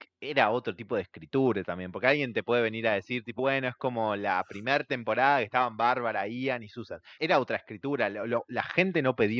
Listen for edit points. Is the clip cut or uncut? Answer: cut